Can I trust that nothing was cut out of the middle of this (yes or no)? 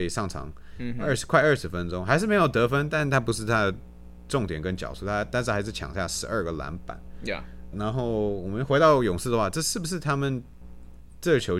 no